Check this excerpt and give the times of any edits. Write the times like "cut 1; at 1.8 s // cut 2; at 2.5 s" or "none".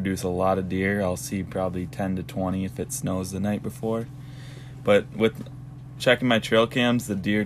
none